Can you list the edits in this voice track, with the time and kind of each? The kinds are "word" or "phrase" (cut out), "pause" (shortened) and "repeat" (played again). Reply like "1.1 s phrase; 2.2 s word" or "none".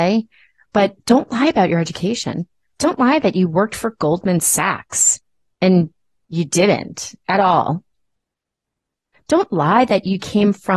none